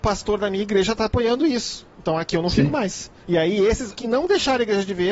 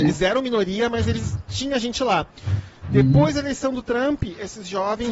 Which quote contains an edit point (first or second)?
first